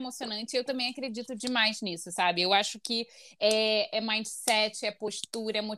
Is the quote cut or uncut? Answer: uncut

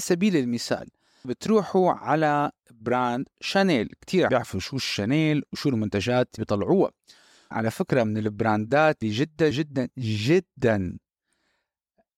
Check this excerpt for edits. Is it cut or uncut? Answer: cut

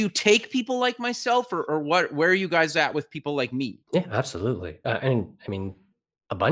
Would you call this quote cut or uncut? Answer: cut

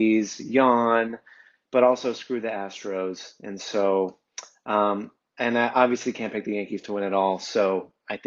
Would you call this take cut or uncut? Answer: uncut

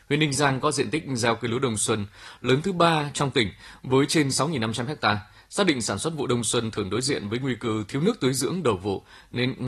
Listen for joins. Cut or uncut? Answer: uncut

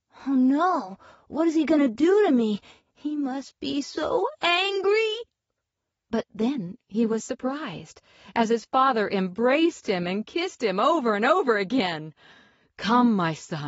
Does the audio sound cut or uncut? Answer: uncut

